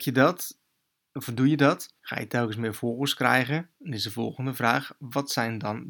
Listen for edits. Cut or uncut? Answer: cut